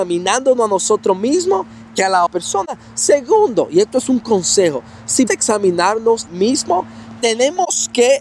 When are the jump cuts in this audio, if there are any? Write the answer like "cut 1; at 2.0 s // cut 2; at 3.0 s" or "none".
cut 1; at 2.3 s // cut 2; at 5.3 s // cut 3; at 6.3 s